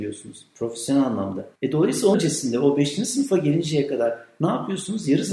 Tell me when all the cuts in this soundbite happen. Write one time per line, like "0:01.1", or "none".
0:01.6
0:02.1

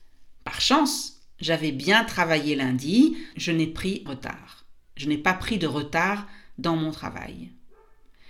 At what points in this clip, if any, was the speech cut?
0:03.3
0:04.1

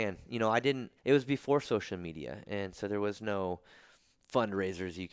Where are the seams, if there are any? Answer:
0:01.0

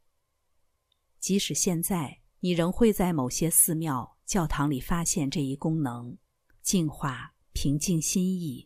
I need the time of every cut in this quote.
0:02.3
0:06.2

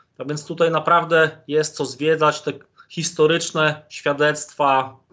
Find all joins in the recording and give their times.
none

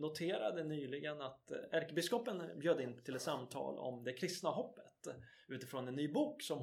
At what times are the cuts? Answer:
none

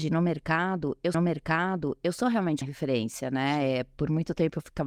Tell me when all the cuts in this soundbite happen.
0:01.1
0:02.6

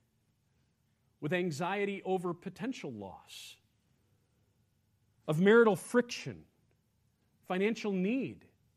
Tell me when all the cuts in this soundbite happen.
none

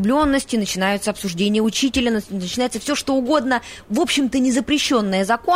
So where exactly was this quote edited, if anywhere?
none

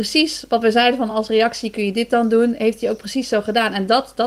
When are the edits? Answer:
none

